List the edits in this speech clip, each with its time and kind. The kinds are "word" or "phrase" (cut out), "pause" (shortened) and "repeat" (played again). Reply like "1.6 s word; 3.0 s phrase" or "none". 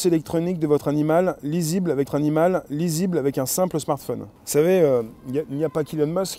2.1 s repeat; 4.4 s pause